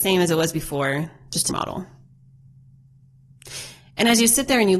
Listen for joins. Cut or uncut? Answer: cut